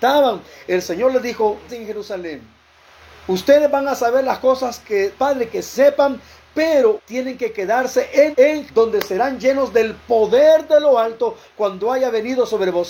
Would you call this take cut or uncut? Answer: cut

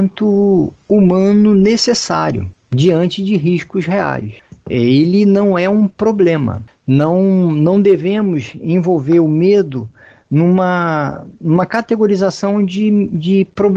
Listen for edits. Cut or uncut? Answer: uncut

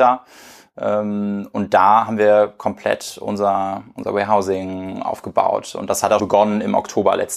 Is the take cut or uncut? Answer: cut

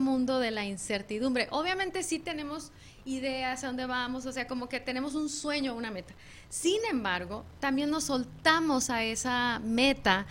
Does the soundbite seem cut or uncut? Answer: uncut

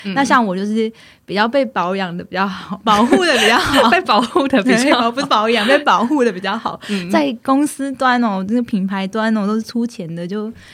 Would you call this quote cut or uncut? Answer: uncut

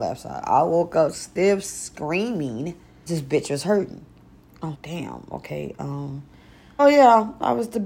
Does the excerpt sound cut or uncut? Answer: cut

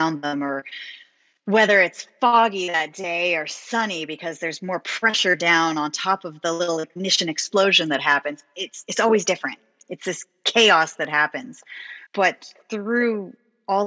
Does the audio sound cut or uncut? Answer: cut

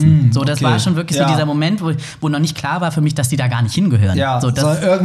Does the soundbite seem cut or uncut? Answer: uncut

